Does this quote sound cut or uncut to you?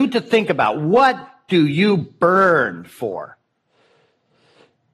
uncut